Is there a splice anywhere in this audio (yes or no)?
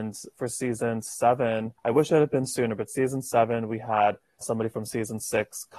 yes